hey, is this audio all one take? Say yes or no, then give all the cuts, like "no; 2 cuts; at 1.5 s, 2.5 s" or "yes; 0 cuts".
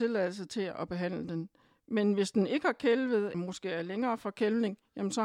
no; 1 cut; at 3.3 s